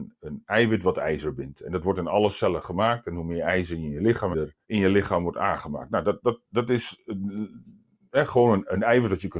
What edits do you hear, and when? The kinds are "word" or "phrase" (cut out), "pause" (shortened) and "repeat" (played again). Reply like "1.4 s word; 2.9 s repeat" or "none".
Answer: 4.3 s phrase; 4.6 s pause

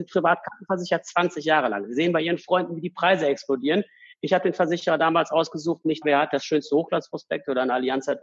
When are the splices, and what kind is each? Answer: 6.0 s word

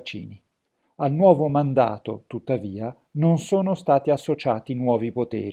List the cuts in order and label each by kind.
none

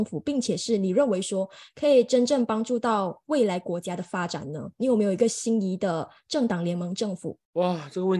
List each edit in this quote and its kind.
none

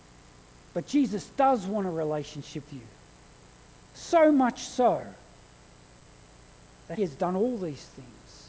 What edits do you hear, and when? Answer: 2.7 s word; 7.0 s word

